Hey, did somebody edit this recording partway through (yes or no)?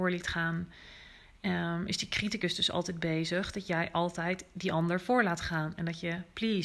no